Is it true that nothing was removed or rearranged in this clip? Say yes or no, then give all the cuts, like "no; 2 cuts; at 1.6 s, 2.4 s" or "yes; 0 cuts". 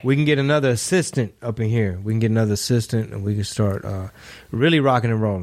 yes; 0 cuts